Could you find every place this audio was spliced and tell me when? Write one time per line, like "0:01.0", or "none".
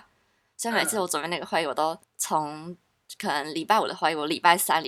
0:02.0